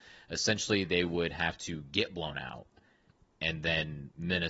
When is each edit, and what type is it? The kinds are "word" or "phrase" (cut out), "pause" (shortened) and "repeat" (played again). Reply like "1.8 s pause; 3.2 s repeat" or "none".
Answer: none

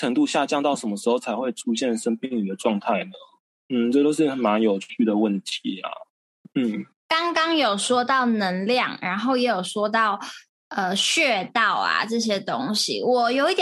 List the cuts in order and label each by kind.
none

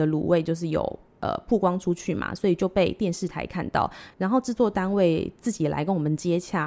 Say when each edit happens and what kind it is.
4.1 s pause

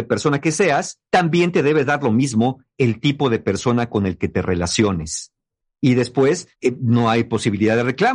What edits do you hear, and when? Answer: 1.1 s pause; 6.5 s pause

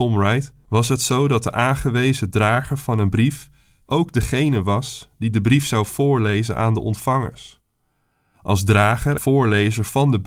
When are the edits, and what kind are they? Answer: 9.2 s word

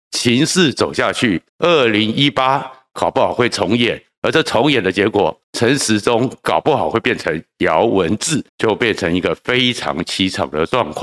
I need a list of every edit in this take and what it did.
1.5 s pause; 5.4 s pause; 8.5 s pause

